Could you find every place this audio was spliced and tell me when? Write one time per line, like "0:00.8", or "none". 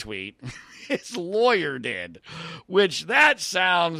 none